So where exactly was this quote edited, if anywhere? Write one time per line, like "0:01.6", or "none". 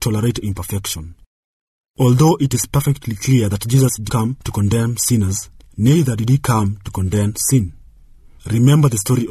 0:04.1